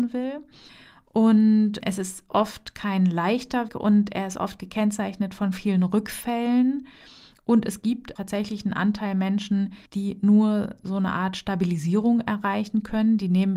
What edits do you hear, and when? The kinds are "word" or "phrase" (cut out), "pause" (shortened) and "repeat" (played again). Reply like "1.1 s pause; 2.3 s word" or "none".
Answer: 3.7 s word; 8.2 s word; 9.9 s pause